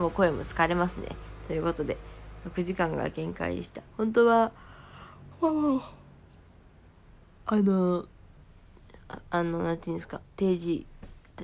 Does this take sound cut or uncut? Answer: cut